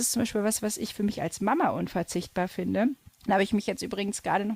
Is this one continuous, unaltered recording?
no; 1 cut; at 3.1 s

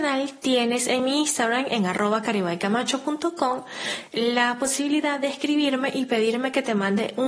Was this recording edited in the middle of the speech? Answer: no; 0 cuts

